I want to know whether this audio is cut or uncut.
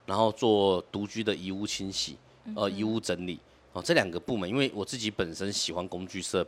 uncut